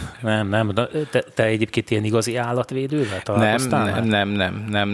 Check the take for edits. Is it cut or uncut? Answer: uncut